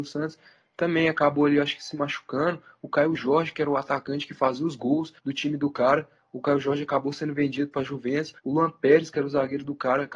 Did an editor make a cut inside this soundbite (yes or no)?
yes